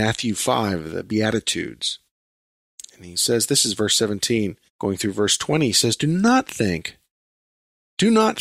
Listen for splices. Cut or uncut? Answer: cut